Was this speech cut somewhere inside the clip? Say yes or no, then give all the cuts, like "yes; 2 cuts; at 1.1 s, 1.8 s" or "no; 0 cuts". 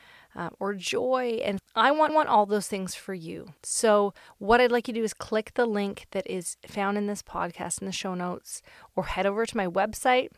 yes; 3 cuts; at 1.6 s, 2.1 s, 3.6 s